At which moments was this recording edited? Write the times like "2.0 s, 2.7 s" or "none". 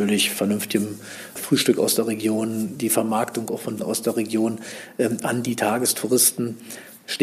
1.4 s, 3.8 s